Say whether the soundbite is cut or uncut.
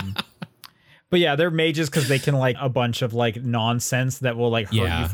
cut